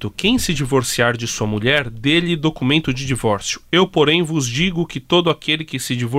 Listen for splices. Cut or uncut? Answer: uncut